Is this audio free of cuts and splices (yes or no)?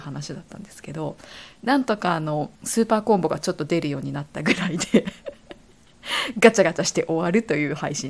no